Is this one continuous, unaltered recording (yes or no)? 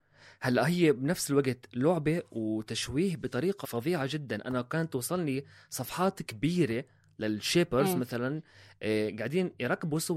no